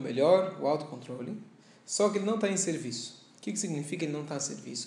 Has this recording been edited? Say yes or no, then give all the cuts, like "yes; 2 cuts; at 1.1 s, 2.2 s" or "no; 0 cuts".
no; 0 cuts